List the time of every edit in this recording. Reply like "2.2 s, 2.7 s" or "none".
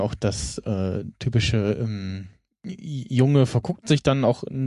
2.5 s